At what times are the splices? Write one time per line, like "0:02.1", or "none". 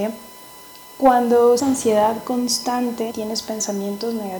0:01.6
0:03.1